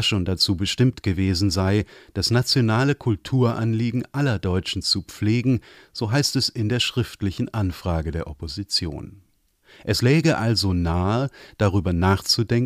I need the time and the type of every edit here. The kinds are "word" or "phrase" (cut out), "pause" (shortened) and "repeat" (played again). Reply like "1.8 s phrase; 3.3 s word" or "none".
none